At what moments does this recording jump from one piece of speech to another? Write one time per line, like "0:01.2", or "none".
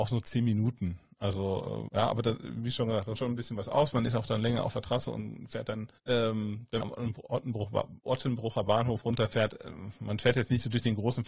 0:01.9
0:03.1
0:06.0
0:06.8
0:08.0